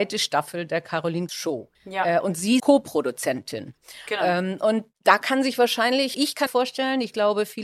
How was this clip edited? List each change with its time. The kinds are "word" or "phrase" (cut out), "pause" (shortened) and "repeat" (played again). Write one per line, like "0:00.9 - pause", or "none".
0:01.3 - word
0:01.7 - pause
0:02.6 - phrase
0:04.9 - pause
0:06.1 - word
0:06.5 - phrase